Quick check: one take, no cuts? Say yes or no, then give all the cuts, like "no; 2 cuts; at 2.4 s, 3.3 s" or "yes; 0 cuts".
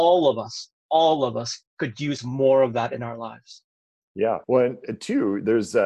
no; 2 cuts; at 1.7 s, 4.4 s